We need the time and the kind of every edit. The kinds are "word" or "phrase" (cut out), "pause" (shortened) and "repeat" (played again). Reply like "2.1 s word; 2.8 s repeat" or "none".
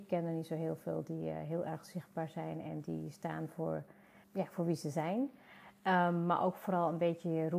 4.2 s word

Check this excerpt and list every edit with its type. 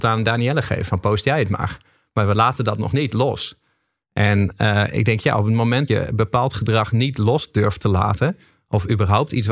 5.9 s word

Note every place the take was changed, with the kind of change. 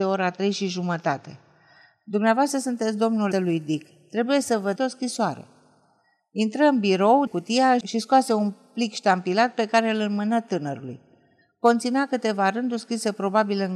3.3 s phrase; 4.8 s word; 7.3 s word

